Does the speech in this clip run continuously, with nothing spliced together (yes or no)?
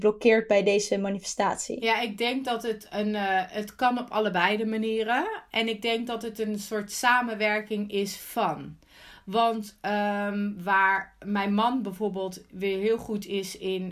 yes